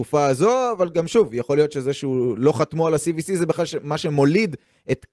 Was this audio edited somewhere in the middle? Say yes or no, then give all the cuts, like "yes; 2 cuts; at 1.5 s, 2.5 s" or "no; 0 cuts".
no; 0 cuts